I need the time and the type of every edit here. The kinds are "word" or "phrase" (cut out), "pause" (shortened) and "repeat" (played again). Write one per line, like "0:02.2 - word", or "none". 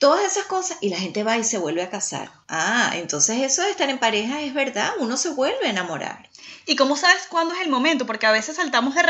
0:02.4 - pause